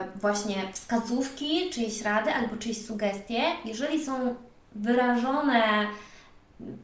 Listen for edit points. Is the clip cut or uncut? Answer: uncut